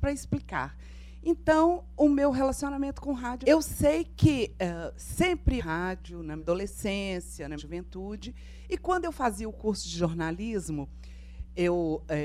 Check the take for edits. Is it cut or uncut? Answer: cut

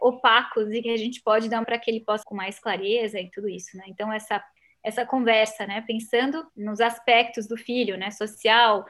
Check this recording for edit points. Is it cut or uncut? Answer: cut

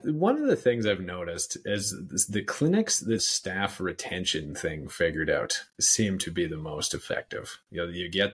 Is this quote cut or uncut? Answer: cut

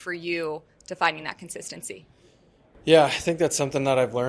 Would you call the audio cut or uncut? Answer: uncut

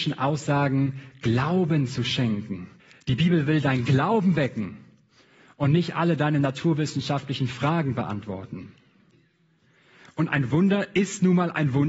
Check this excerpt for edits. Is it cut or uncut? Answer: cut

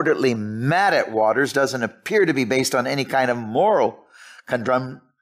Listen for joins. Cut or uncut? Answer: uncut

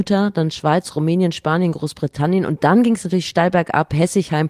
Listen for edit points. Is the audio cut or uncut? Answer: uncut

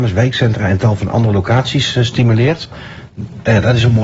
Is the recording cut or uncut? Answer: uncut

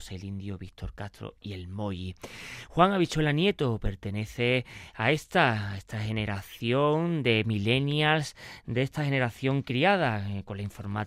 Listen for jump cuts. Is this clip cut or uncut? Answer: uncut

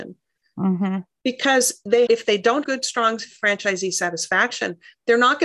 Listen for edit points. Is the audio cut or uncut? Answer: cut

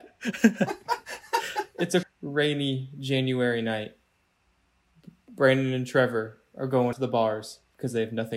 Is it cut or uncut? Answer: cut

